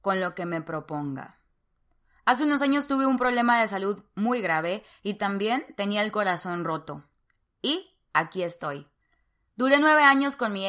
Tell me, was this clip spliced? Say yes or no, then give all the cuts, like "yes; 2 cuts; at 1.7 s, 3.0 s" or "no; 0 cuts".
no; 0 cuts